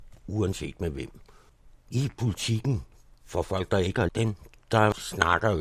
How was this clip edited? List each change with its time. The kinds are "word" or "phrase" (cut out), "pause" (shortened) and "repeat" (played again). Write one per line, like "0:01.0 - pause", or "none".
0:01.5 - pause
0:04.1 - word